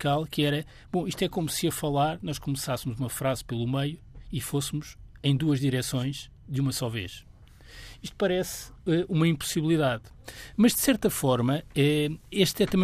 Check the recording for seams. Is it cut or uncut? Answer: uncut